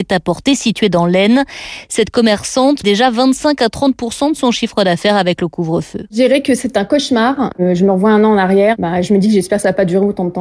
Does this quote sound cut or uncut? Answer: cut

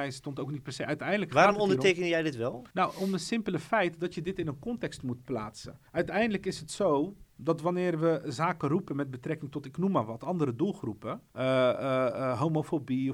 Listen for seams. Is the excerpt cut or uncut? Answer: cut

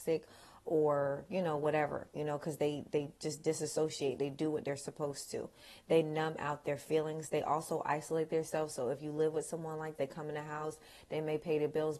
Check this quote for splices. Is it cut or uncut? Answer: cut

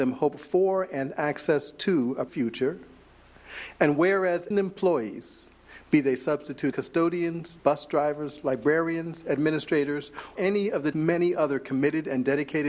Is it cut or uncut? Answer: cut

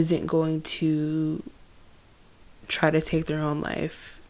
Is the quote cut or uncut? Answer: uncut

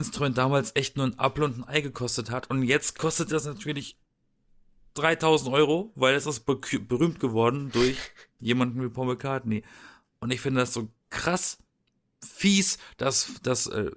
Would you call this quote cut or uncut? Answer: uncut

